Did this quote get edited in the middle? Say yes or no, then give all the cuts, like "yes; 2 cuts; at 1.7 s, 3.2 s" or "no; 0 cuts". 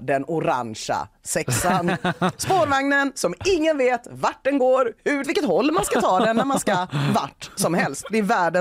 yes; 1 cut; at 5.2 s